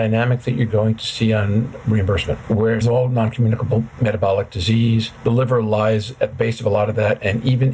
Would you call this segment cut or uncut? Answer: cut